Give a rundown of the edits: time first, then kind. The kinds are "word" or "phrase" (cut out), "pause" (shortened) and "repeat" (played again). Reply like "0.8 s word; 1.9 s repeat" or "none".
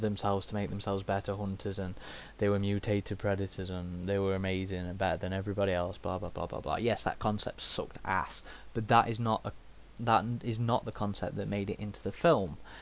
none